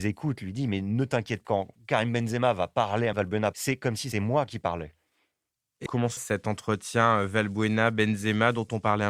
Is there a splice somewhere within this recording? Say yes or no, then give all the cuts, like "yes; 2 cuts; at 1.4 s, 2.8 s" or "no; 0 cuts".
yes; 5 cuts; at 1.4 s, 3.1 s, 4.1 s, 5.9 s, 6.2 s